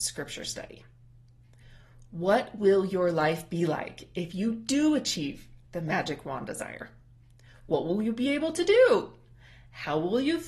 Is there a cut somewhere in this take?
yes; 1 cut; at 5.6 s

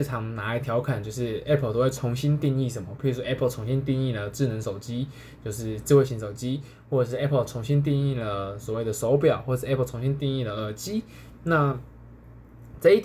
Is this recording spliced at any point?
no; 0 cuts

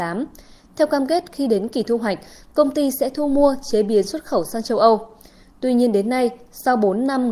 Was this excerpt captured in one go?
yes; 0 cuts

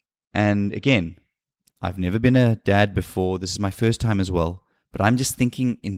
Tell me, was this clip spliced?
no; 0 cuts

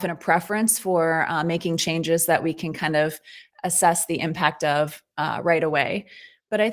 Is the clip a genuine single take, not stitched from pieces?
yes; 0 cuts

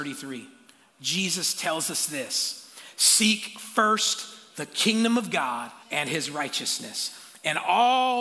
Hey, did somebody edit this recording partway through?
yes; 1 cut; at 5.8 s

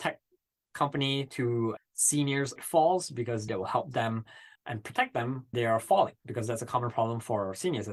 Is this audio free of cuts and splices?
no; 6 cuts; at 1.8 s, 2.6 s, 3.5 s, 4.6 s, 5.5 s, 6.2 s

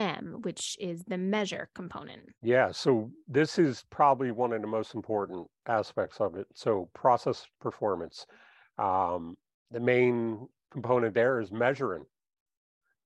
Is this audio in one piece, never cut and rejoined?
no; 3 cuts; at 2.3 s, 7.5 s, 9.5 s

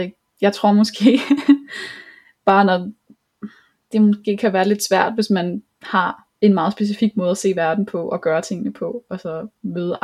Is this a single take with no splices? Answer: yes; 0 cuts

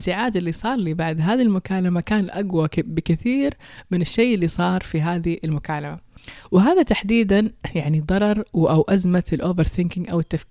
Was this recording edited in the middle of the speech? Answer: no; 0 cuts

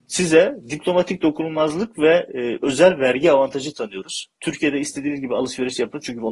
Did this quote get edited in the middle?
no; 0 cuts

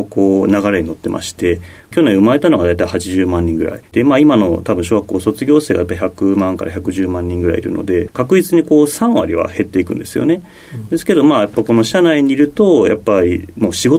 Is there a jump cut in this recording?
no; 0 cuts

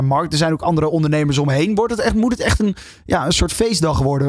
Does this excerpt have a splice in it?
no; 0 cuts

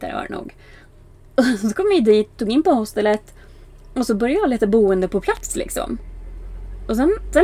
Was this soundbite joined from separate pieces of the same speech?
no; 0 cuts

